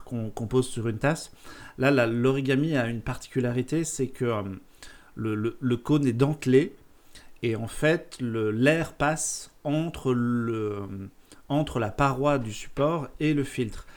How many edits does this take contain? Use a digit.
0